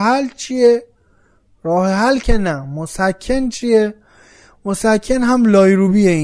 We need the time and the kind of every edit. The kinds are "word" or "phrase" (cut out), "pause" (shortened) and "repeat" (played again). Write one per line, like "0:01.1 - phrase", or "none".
none